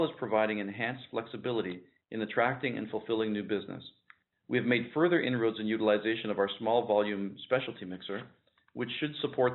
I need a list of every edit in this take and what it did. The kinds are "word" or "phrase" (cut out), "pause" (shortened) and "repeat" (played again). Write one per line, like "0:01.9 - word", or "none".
none